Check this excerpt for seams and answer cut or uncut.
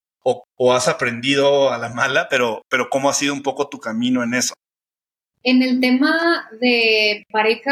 uncut